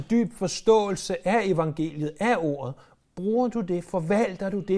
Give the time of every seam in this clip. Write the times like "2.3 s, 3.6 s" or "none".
none